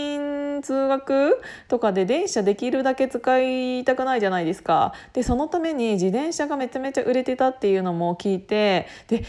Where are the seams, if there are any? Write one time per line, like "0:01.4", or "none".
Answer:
none